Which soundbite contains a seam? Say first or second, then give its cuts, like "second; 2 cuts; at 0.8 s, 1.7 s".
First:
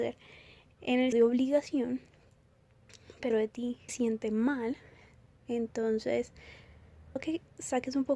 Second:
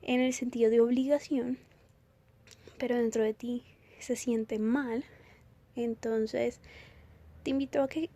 first; 4 cuts; at 1.1 s, 3.3 s, 3.9 s, 7.2 s